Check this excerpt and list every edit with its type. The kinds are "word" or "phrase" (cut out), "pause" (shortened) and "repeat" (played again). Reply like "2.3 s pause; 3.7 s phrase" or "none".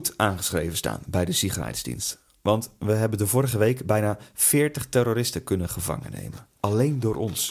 none